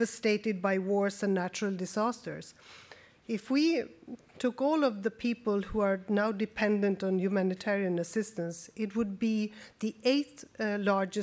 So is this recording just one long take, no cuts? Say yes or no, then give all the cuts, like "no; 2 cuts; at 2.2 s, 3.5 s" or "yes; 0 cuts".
yes; 0 cuts